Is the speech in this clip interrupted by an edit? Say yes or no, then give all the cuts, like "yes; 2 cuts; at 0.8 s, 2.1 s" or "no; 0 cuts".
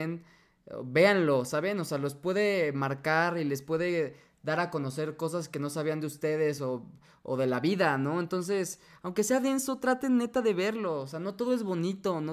no; 0 cuts